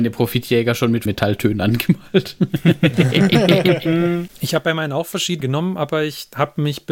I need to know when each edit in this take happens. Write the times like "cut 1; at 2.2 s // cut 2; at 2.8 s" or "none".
cut 1; at 1.1 s // cut 2; at 5.4 s